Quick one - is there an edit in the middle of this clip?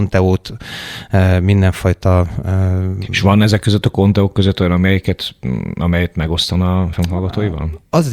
yes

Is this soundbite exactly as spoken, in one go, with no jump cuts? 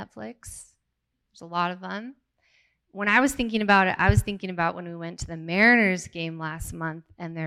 yes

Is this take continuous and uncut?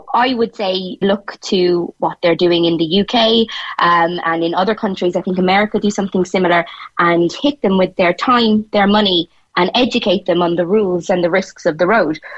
no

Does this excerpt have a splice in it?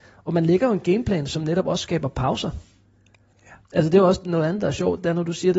no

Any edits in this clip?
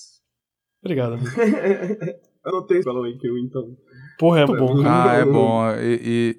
yes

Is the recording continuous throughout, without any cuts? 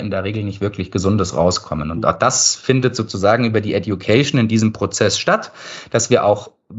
yes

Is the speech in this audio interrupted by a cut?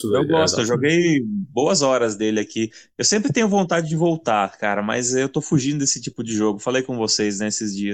no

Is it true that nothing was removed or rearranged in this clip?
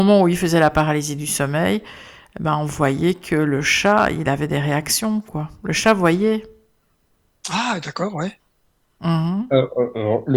yes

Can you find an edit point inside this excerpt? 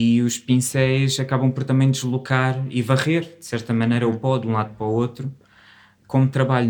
no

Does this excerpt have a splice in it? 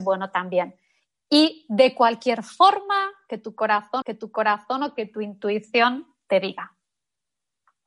yes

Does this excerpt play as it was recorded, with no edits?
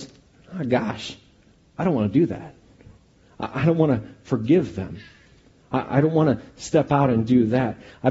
yes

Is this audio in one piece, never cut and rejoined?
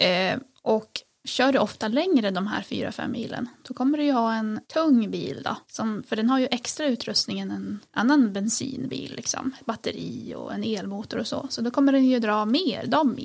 no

